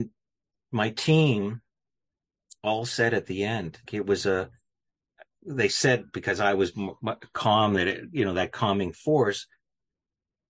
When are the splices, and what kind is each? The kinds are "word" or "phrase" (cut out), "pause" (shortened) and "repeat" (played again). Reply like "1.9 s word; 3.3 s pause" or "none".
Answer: 3.9 s word; 4.9 s pause